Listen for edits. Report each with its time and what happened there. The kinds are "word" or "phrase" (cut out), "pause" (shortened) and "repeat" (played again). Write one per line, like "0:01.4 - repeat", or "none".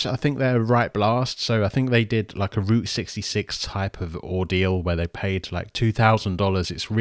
none